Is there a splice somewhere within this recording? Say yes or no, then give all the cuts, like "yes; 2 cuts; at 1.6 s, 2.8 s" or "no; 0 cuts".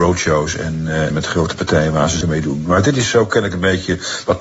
yes; 2 cuts; at 1.1 s, 2.2 s